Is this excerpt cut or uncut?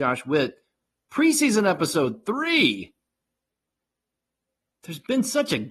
uncut